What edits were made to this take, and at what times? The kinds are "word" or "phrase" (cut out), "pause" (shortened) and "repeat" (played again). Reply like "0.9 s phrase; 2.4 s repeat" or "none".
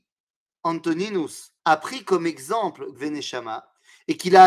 1.6 s pause; 2.9 s word